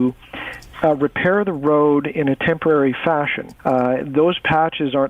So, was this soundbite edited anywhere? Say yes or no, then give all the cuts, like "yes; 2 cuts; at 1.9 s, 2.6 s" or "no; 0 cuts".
yes; 1 cut; at 3.6 s